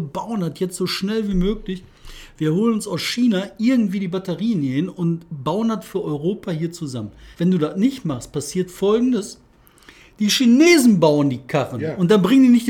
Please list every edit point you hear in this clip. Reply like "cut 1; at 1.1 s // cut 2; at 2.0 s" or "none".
cut 1; at 7.3 s